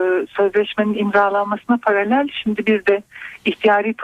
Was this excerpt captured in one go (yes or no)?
yes